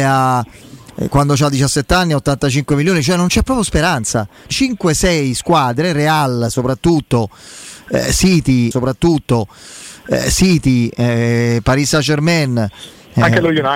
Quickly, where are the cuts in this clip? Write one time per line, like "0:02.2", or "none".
0:04.5
0:08.7